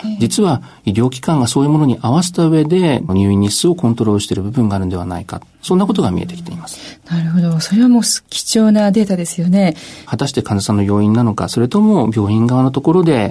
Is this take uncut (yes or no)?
no